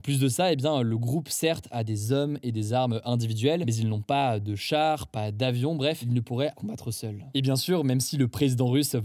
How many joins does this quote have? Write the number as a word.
one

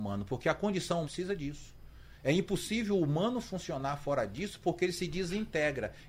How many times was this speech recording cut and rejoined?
one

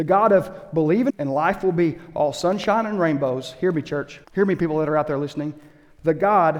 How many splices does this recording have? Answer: two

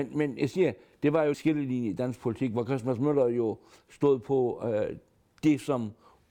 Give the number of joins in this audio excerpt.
one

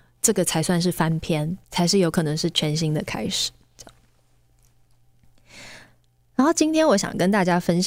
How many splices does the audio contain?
one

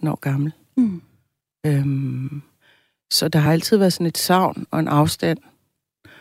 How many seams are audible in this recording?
zero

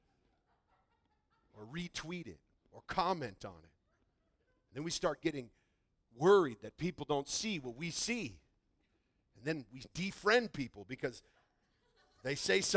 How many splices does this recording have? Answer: zero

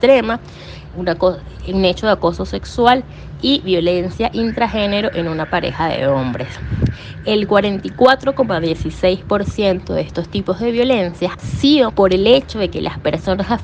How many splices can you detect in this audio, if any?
three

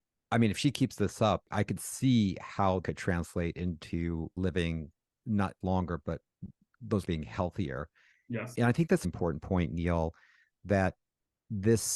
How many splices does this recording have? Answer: six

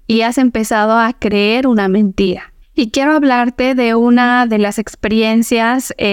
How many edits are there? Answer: one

